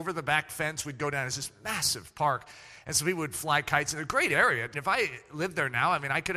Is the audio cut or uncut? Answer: cut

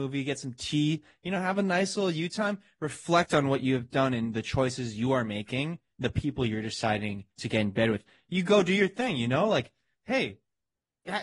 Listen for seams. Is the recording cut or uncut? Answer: cut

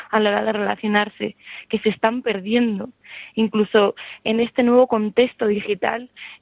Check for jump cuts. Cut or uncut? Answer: uncut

